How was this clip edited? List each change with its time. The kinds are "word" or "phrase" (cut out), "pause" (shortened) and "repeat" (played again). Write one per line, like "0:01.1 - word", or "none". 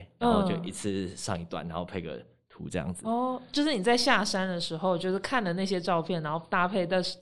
none